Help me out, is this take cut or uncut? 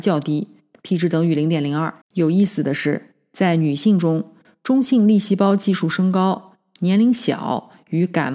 cut